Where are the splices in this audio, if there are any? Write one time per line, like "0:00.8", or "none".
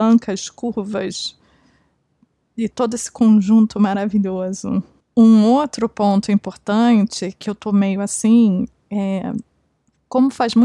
0:02.7